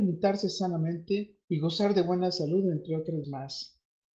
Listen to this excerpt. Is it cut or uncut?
cut